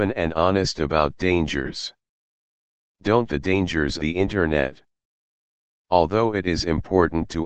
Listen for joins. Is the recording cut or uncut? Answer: cut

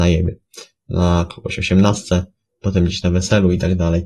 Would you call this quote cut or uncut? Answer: uncut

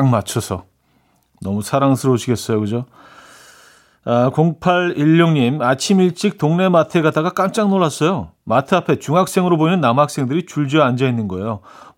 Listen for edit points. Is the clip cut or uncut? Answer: cut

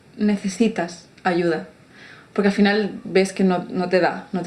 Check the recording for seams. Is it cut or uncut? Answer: uncut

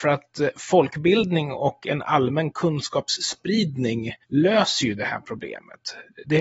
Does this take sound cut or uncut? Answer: cut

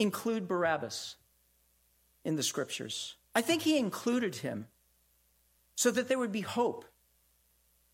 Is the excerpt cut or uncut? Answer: cut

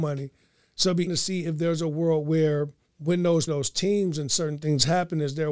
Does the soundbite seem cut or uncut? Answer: cut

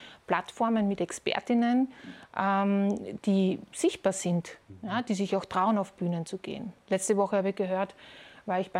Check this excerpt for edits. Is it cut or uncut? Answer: uncut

